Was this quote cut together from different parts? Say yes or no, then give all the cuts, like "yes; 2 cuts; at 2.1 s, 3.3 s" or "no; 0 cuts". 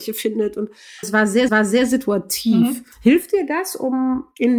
yes; 3 cuts; at 1.0 s, 1.5 s, 2.9 s